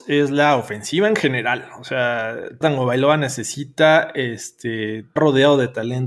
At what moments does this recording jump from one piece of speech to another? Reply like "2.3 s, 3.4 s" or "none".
2.6 s, 5.2 s